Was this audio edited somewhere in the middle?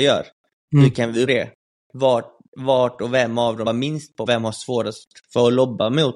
yes; 3 cuts; at 1.3 s, 3.7 s, 4.3 s

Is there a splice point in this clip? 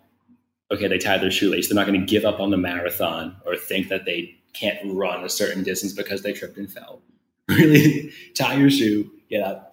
no; 0 cuts

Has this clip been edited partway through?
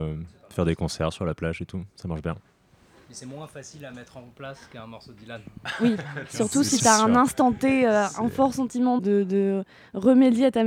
yes; 2 cuts; at 6.8 s, 9.0 s

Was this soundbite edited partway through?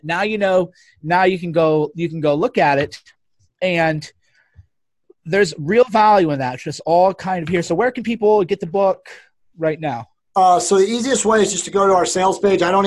no; 0 cuts

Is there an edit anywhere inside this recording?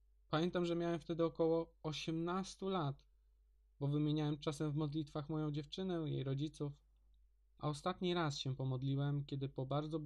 no; 0 cuts

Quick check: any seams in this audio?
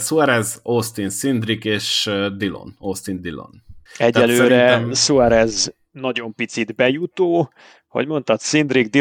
yes; 1 cut; at 3.9 s

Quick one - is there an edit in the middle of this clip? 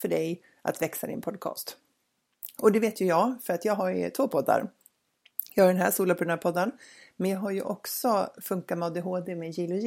no; 0 cuts

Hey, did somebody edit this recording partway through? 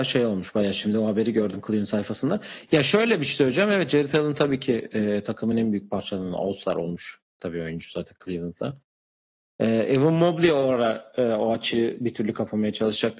no; 0 cuts

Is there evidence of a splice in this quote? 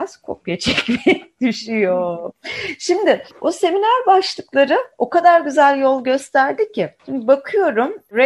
no; 0 cuts

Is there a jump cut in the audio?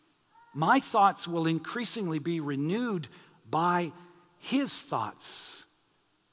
no; 0 cuts

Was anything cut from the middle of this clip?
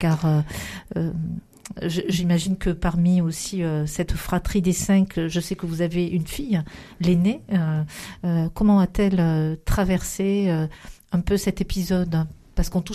no; 0 cuts

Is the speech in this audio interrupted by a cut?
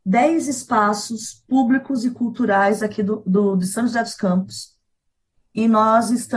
no; 0 cuts

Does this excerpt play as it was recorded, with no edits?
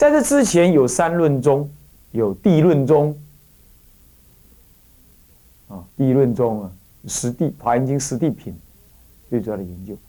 no; 2 cuts; at 2.0 s, 5.9 s

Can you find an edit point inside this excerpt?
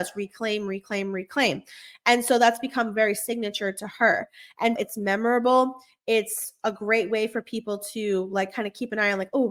yes; 1 cut; at 4.8 s

